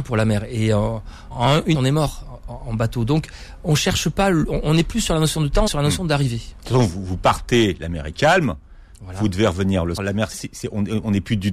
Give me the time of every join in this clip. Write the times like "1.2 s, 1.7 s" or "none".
1.3 s, 1.7 s, 5.7 s, 10.0 s, 10.3 s